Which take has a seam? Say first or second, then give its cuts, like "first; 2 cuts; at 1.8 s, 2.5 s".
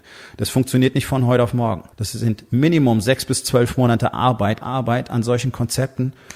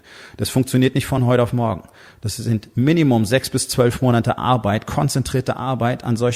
first; 2 cuts; at 1.9 s, 4.6 s